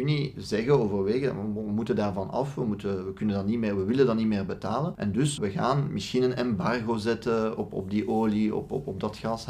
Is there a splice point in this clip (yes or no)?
yes